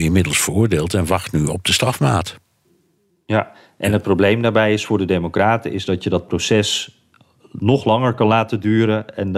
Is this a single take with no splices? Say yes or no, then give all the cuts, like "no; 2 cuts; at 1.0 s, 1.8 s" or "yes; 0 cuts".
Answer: yes; 0 cuts